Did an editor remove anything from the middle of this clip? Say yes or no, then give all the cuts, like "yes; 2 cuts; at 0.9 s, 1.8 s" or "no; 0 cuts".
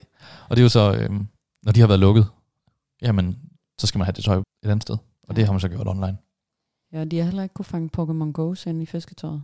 no; 0 cuts